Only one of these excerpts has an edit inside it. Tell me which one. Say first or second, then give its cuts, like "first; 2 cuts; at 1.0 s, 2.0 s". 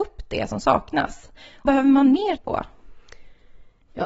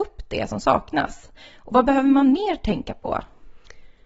first; 2 cuts; at 1.7 s, 2.4 s